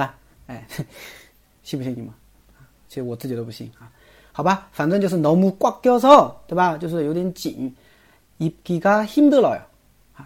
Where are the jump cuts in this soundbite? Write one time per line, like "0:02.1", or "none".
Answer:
none